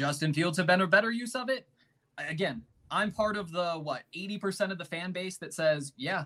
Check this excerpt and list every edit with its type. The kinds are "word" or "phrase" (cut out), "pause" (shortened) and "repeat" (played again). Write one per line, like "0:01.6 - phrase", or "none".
none